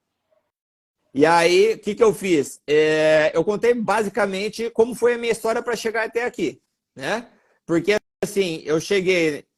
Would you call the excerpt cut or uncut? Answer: uncut